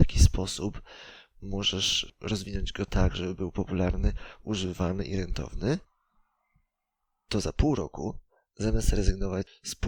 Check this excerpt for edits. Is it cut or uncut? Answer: uncut